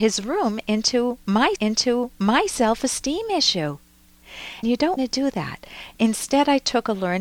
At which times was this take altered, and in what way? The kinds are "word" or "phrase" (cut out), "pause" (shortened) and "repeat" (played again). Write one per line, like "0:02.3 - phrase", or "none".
0:01.6 - repeat
0:04.6 - word
0:05.0 - word